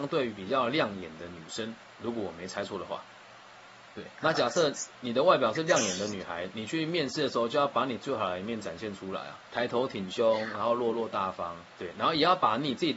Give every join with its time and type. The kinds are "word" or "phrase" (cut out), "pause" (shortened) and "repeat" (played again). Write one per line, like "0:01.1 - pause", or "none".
0:04.1 - pause
0:09.5 - pause
0:11.7 - pause